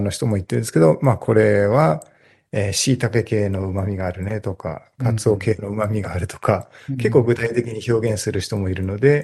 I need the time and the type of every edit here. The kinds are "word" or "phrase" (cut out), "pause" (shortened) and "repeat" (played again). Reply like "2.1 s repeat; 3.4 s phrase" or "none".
none